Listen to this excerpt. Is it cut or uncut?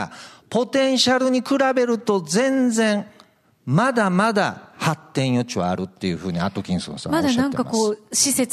uncut